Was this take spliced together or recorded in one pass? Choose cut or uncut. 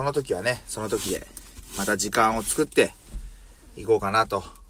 uncut